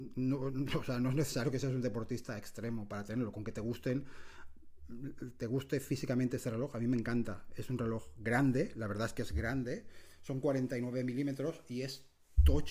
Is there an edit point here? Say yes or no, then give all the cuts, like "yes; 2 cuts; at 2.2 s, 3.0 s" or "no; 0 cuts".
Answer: no; 0 cuts